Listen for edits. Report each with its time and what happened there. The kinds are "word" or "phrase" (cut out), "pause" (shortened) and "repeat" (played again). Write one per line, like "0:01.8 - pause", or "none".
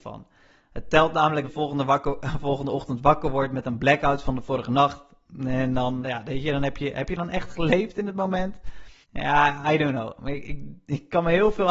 0:01.4 - phrase
0:06.0 - word
0:09.0 - pause